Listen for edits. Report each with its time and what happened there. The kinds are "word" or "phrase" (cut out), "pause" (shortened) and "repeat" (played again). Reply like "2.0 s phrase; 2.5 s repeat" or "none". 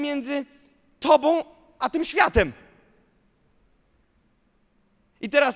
none